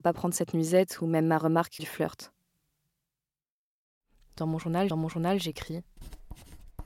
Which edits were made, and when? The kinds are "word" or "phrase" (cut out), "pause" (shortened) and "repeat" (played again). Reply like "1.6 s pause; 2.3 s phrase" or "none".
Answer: 1.8 s word; 4.9 s repeat